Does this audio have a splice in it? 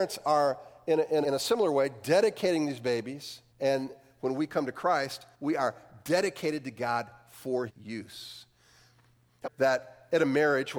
yes; 5 cuts; at 1.2 s, 3.5 s, 5.3 s, 7.7 s, 9.4 s

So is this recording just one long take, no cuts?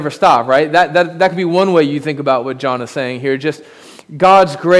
yes; 0 cuts

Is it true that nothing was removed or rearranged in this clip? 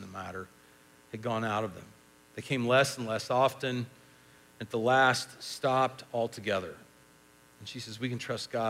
yes; 0 cuts

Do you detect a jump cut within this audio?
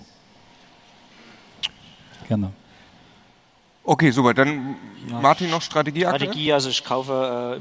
no; 0 cuts

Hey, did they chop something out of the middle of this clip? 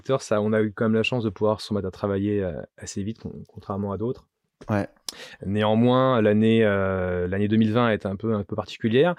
no; 0 cuts

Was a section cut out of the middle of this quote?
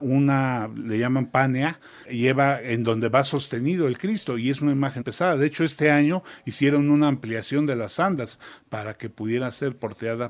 yes; 2 cuts; at 2.0 s, 5.0 s

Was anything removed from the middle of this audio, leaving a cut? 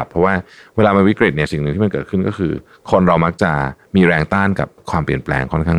no; 0 cuts

